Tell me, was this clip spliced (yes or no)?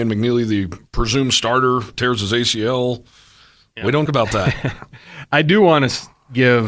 yes